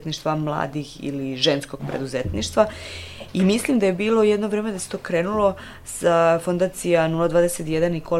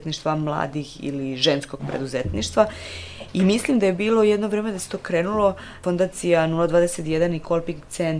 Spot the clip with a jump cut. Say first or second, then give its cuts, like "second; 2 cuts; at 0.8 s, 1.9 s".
second; 1 cut; at 5.8 s